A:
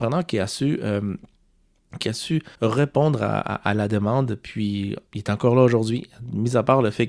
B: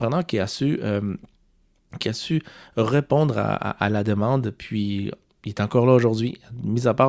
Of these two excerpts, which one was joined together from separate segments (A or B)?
A